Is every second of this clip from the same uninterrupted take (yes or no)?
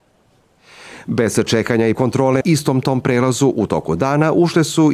no